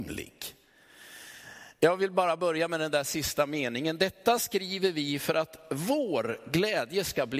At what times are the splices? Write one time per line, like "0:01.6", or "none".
none